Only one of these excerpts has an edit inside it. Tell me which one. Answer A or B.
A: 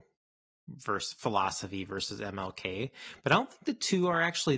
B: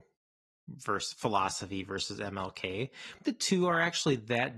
B